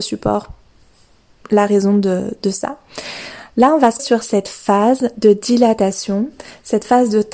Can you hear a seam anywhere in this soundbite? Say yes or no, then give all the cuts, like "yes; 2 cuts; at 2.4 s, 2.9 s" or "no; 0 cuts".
yes; 1 cut; at 4.0 s